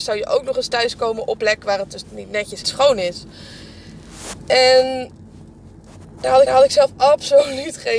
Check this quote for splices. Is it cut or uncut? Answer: cut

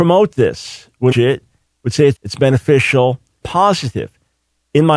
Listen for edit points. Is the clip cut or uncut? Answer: cut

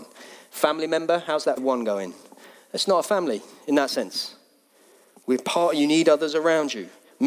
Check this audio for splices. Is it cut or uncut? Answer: cut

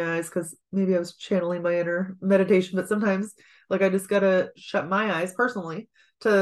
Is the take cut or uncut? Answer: uncut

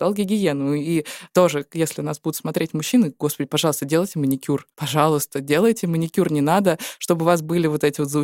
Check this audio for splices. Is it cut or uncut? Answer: cut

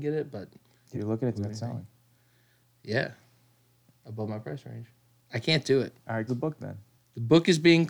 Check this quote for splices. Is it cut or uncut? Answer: cut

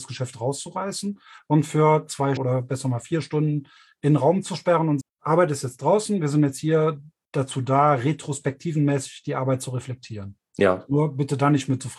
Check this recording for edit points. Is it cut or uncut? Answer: cut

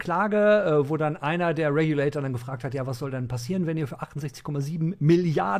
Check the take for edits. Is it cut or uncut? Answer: uncut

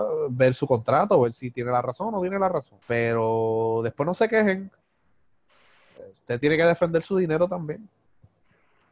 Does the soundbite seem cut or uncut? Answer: cut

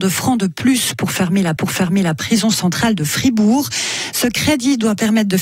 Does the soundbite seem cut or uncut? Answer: cut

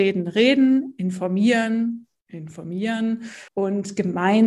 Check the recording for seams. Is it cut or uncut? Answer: cut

